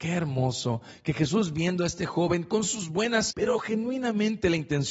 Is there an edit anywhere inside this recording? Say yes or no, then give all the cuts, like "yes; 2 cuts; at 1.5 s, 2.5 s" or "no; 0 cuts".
yes; 1 cut; at 3.3 s